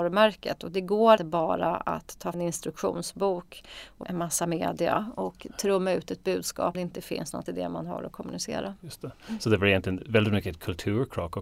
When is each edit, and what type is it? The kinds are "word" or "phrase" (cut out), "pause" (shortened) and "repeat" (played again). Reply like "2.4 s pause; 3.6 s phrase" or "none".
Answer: 1.2 s word; 2.3 s word; 4.0 s word; 6.7 s word; 7.5 s word

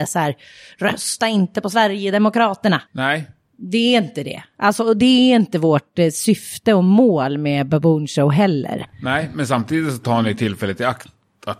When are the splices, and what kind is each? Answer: 2.9 s pause

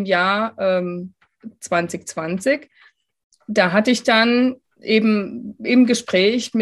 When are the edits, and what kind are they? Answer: none

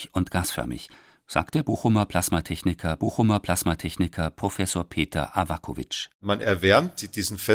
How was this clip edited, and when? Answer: 3.0 s repeat; 6.1 s pause

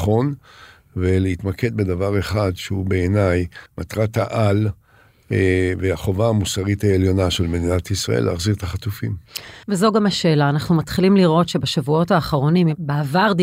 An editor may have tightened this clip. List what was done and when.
3.7 s pause; 9.6 s pause

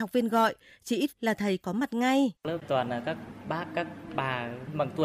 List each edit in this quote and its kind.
1.1 s word; 2.4 s pause

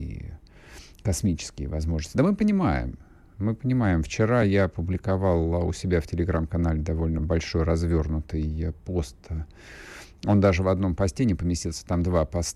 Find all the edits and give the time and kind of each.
none

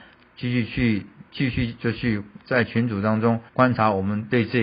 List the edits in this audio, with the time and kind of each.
3.5 s pause

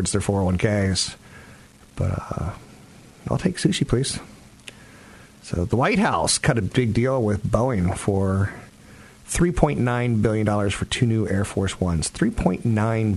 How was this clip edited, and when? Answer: none

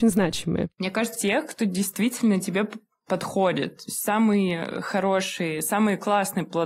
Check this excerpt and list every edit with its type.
1.1 s phrase

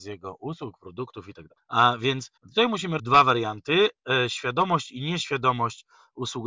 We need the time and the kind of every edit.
1.6 s pause; 2.4 s pause; 3.0 s word

